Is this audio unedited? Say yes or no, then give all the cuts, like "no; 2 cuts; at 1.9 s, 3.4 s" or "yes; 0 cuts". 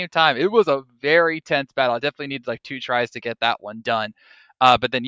yes; 0 cuts